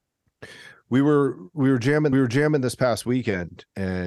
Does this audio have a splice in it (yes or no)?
yes